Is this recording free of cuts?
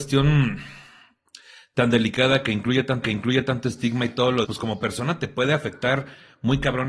no; 2 cuts; at 3.0 s, 4.4 s

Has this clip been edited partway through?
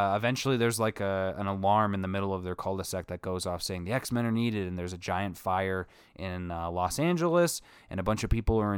no; 0 cuts

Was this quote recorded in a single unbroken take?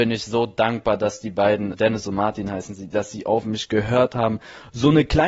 no; 1 cut; at 1.7 s

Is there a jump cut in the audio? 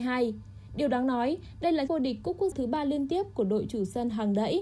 yes; 2 cuts; at 1.9 s, 2.5 s

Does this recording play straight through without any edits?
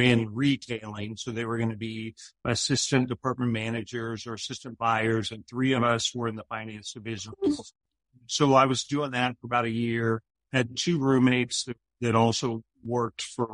yes; 0 cuts

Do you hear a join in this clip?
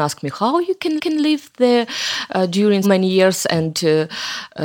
yes; 2 cuts; at 1.0 s, 2.8 s

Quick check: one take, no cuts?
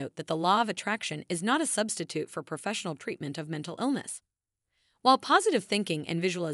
yes; 0 cuts

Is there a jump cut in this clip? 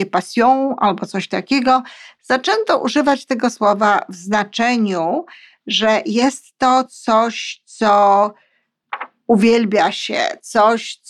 no; 0 cuts

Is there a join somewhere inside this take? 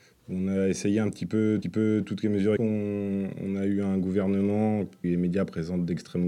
yes; 3 cuts; at 1.6 s, 2.6 s, 5.0 s

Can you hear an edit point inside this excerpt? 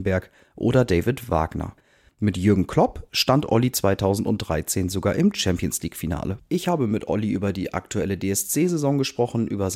no; 0 cuts

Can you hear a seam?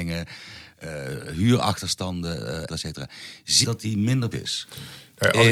yes; 3 cuts; at 2.7 s, 3.6 s, 4.3 s

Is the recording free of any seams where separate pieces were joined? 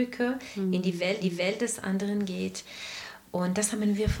no; 1 cut; at 1.2 s

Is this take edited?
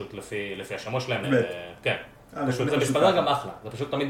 yes; 2 cuts; at 1.2 s, 2.7 s

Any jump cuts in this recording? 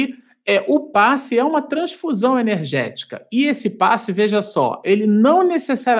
no; 0 cuts

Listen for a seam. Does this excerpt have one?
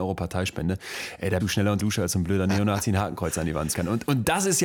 yes; 3 cuts; at 1.4 s, 1.8 s, 3.7 s

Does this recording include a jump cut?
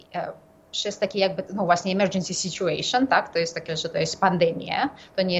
yes; 2 cuts; at 1.5 s, 3.7 s

